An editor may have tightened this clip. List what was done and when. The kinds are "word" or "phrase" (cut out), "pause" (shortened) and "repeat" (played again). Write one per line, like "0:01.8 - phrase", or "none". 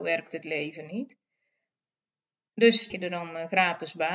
0:02.9 - phrase